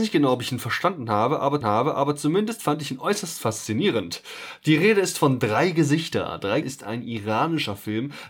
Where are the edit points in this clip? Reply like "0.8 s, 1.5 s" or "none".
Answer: 1.6 s, 6.6 s